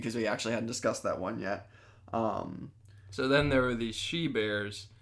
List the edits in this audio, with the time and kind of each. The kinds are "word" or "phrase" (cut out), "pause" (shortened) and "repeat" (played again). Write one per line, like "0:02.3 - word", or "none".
none